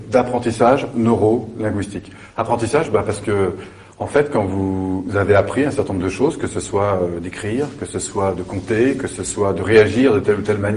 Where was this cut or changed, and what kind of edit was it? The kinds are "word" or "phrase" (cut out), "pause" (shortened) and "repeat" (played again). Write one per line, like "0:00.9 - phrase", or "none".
none